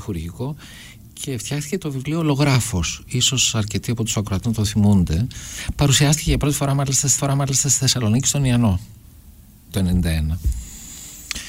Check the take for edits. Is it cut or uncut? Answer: cut